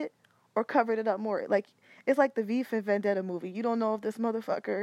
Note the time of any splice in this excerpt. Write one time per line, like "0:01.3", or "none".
none